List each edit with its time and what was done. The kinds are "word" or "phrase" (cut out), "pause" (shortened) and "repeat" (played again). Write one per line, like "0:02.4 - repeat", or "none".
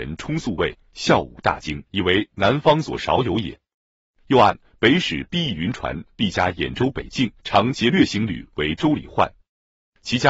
0:01.9 - pause
0:07.4 - pause